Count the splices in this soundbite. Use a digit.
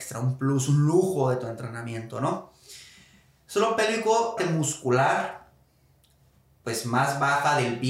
1